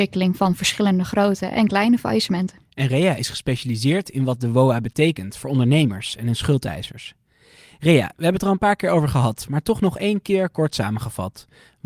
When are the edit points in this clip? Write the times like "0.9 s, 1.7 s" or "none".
none

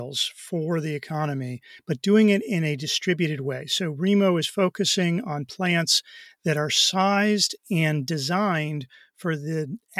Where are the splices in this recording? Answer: none

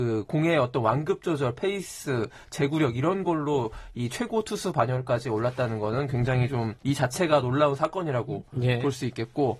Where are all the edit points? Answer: 6.8 s

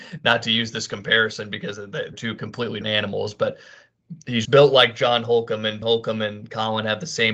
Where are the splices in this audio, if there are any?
2.1 s, 2.8 s, 4.4 s, 5.8 s

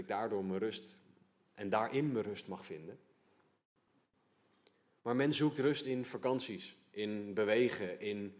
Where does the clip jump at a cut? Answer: none

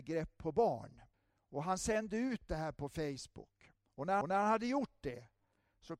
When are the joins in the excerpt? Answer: 1.1 s, 4.2 s

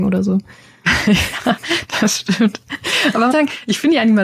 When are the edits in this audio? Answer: 3.3 s

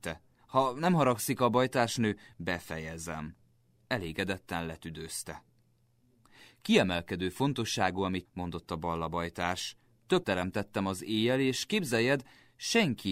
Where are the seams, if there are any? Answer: 8.2 s, 10.2 s

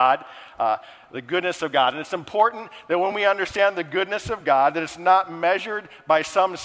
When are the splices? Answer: none

